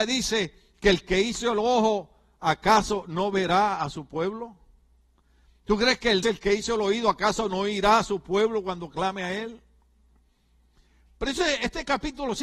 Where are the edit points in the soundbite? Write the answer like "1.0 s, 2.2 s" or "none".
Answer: 6.2 s